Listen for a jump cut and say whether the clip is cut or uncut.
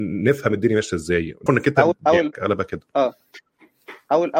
cut